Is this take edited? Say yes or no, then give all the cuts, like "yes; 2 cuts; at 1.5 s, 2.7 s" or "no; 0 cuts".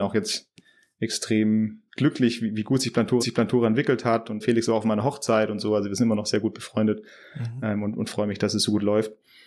yes; 3 cuts; at 1.9 s, 3.2 s, 4.4 s